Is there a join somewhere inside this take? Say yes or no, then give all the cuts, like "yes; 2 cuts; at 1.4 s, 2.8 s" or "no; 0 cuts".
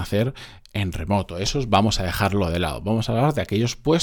no; 0 cuts